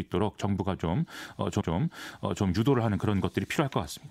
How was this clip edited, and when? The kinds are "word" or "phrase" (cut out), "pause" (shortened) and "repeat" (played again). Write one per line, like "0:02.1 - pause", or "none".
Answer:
0:01.6 - repeat